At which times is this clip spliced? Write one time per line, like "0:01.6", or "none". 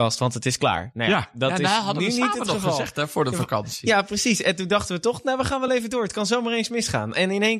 none